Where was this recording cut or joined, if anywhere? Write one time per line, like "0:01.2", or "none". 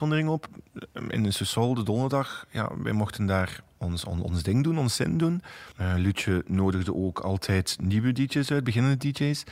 0:05.7